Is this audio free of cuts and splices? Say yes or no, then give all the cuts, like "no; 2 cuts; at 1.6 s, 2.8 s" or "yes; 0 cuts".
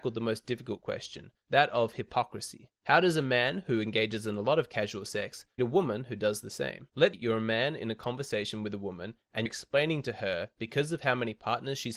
no; 4 cuts; at 2.8 s, 5.6 s, 7.1 s, 9.5 s